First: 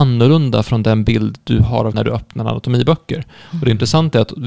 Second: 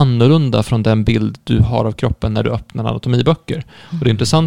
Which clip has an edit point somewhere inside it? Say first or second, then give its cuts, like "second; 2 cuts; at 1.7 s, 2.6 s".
first; 1 cut; at 1.9 s